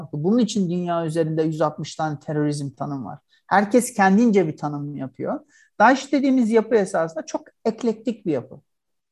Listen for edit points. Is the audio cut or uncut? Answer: uncut